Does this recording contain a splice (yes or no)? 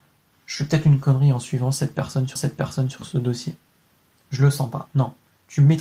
yes